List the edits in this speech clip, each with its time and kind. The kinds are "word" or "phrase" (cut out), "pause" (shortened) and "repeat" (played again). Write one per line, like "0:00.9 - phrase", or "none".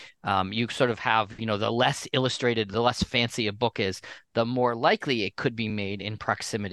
none